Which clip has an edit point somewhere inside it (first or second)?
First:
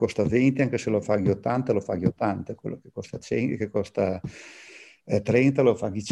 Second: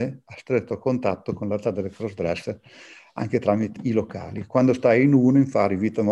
second